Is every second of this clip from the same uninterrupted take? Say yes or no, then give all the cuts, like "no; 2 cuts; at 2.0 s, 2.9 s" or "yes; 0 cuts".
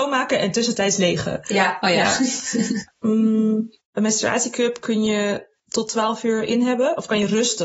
no; 2 cuts; at 3.8 s, 5.6 s